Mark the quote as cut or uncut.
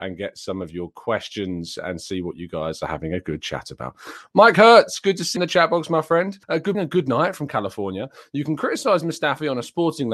cut